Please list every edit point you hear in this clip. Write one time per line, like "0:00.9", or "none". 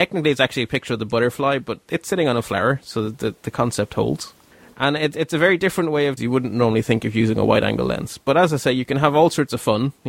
0:04.5
0:06.2